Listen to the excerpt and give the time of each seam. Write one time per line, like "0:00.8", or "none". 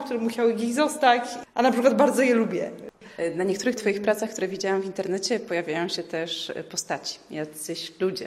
none